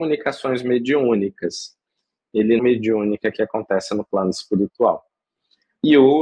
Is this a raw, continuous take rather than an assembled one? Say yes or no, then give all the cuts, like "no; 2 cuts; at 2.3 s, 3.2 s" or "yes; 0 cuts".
no; 1 cut; at 2.6 s